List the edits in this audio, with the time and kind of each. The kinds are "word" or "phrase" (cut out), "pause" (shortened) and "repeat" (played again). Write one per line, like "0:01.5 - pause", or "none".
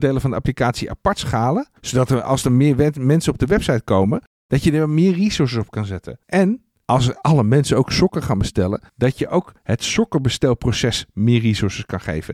0:01.8 - pause
0:06.2 - pause
0:08.9 - pause
0:09.6 - pause